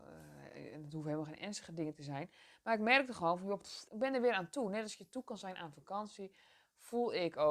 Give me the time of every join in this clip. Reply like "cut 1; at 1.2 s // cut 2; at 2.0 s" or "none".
cut 1; at 3.9 s